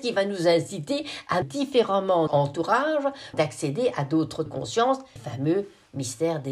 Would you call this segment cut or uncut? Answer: cut